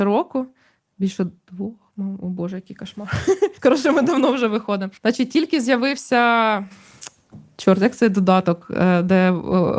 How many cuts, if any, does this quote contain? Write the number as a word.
two